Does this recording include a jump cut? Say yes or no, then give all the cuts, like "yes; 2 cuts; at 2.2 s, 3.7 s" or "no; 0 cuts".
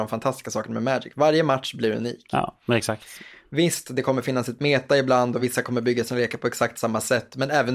no; 0 cuts